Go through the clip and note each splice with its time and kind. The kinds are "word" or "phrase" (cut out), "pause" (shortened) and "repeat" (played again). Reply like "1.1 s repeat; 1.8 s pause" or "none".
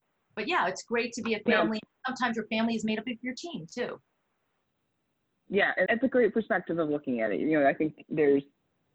5.9 s word